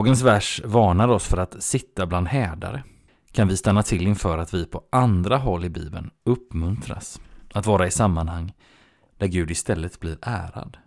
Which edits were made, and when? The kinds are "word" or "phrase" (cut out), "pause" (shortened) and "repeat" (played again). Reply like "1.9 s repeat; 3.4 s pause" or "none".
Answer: none

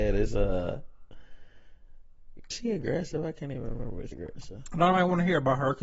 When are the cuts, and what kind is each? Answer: 2.5 s word; 4.1 s word

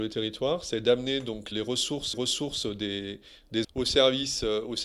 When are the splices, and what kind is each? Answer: 1.5 s word; 2.1 s repeat; 3.6 s word

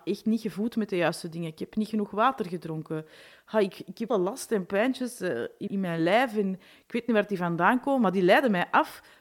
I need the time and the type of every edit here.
4.1 s phrase; 5.7 s word

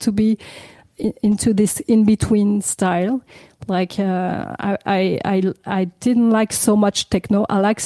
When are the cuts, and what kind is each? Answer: none

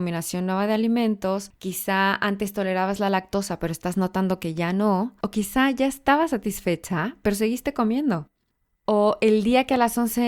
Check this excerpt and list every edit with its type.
none

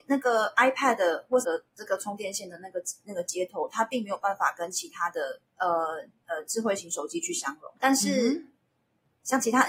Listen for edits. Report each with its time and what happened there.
1.4 s word; 5.5 s pause; 7.8 s pause

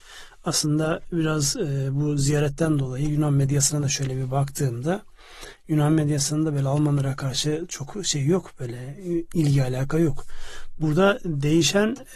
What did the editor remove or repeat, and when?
none

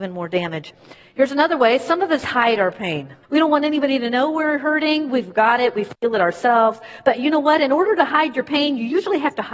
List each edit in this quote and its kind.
3.2 s pause

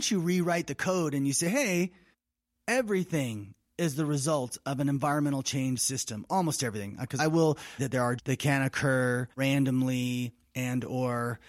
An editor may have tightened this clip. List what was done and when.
2.1 s pause; 5.8 s phrase; 7.2 s word; 7.8 s word; 8.2 s phrase; 9.3 s pause

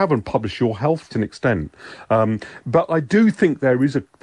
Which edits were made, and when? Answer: 1.1 s phrase

